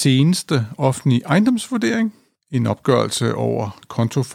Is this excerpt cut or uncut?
uncut